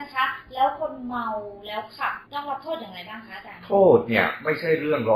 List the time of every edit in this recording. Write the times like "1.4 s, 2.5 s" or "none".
2.3 s